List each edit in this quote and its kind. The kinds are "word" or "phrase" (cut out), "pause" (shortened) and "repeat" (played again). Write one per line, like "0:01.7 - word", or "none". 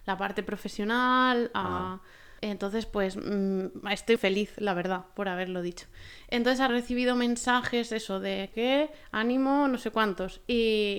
0:02.4 - pause
0:04.2 - word
0:06.7 - phrase
0:08.5 - phrase

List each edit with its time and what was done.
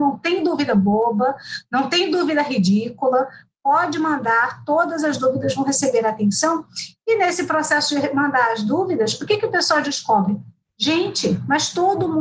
none

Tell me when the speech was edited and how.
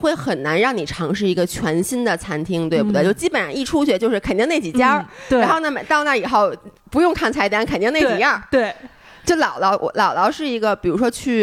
none

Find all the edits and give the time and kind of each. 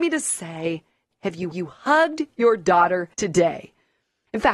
0:01.1 - word
0:01.5 - repeat
0:03.1 - pause

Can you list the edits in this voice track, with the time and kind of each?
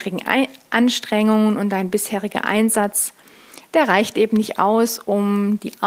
none

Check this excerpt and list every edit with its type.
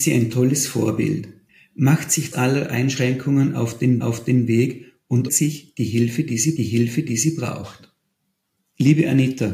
0:01.5 - pause
0:02.3 - word
0:04.0 - repeat
0:05.3 - word
0:06.6 - repeat

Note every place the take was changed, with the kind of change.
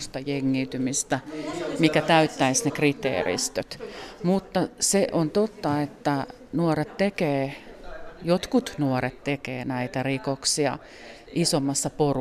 none

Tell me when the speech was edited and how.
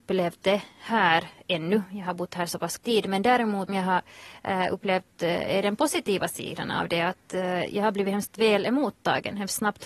0:02.8 - word
0:03.7 - phrase

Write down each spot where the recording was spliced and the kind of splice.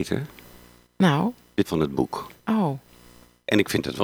0:01.6 - word

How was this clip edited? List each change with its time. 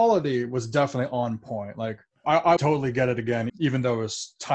0:02.1 - pause
0:02.6 - word
0:03.5 - word

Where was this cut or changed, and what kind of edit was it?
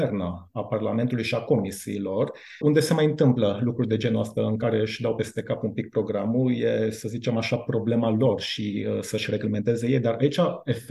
0:02.6 - word

